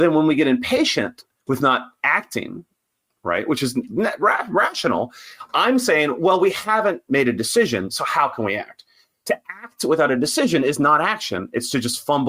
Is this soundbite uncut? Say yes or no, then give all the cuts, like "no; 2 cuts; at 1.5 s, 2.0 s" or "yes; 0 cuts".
yes; 0 cuts